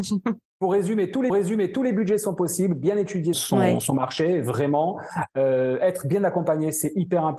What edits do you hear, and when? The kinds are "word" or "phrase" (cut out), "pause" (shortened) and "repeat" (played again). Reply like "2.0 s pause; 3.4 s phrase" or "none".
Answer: 1.3 s repeat; 3.3 s word